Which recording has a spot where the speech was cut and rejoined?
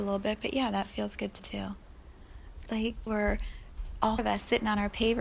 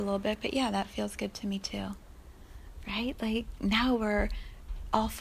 first; 4 cuts; at 1.4 s, 2.7 s, 3.1 s, 4.2 s

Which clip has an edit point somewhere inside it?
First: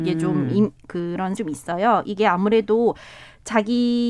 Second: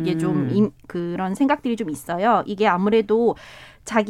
first; 1 cut; at 1.4 s

